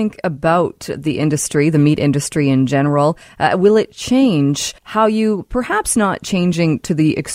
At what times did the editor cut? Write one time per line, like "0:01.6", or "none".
0:04.8